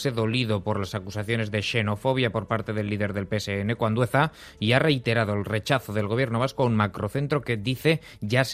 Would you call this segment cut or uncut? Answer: uncut